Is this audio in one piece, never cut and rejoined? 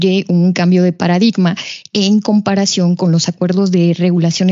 yes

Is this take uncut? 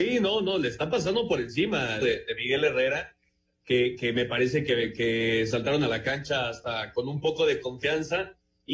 no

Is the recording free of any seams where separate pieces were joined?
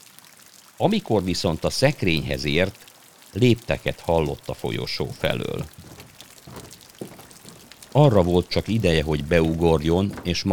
yes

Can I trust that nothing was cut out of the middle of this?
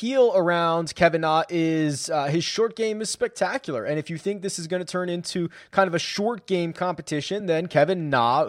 yes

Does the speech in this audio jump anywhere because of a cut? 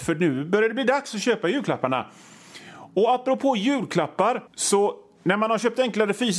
yes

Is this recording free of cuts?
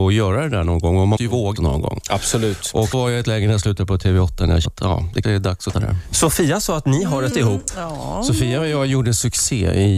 no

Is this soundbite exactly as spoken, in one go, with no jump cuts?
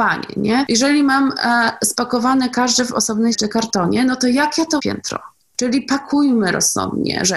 no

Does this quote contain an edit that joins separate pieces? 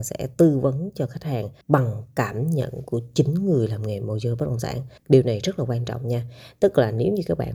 yes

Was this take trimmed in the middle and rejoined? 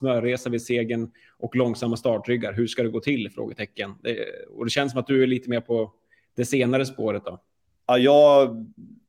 no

